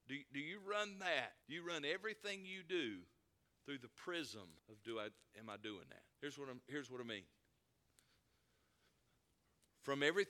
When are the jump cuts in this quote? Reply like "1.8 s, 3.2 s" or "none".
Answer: 1.4 s, 3.5 s, 4.6 s, 6.1 s